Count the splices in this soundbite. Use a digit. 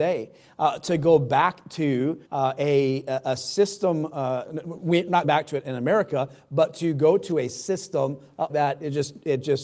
3